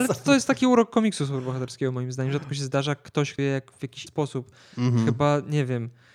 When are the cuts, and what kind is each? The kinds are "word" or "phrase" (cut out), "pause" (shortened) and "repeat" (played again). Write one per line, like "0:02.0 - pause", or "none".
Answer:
0:03.4 - word
0:04.1 - word